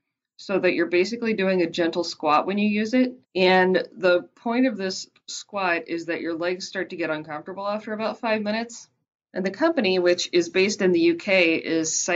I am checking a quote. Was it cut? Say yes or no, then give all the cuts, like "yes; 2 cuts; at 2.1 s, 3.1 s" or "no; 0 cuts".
yes; 2 cuts; at 3.2 s, 9.0 s